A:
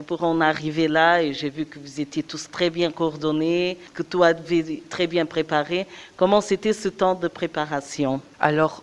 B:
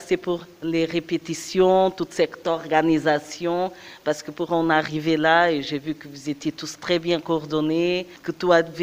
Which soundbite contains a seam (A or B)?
A